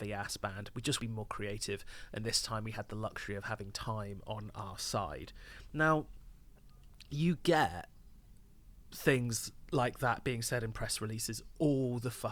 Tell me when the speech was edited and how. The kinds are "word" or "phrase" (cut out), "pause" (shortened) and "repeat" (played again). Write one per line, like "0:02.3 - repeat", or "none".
0:01.0 - phrase

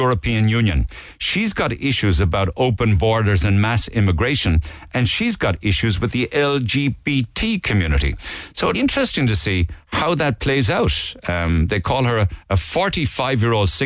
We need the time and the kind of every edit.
0:08.7 - word

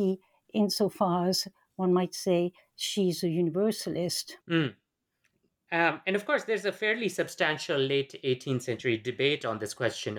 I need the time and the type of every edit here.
0:04.4 - pause

